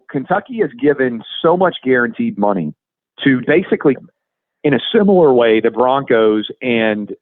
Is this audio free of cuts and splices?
no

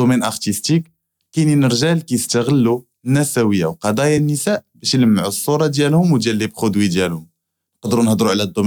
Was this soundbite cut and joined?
no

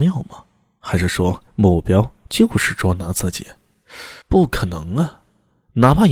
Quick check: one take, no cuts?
no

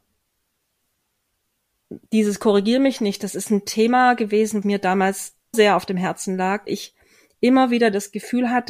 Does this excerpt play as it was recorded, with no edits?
no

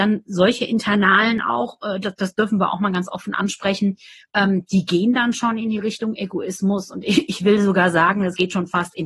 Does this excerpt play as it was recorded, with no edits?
yes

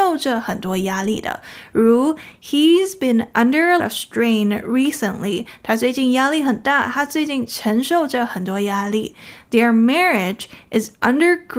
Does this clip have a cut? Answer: yes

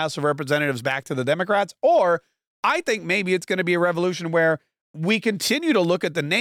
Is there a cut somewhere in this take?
no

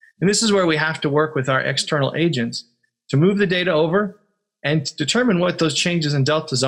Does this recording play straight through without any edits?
yes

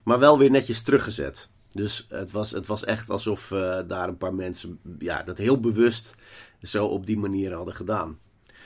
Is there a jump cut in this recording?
no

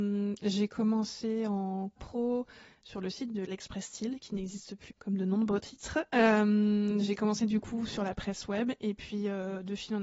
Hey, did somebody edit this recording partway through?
yes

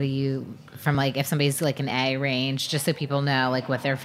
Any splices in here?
no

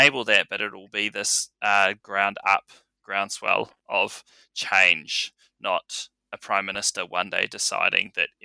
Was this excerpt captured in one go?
yes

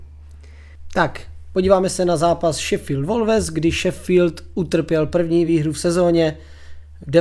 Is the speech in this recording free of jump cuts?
yes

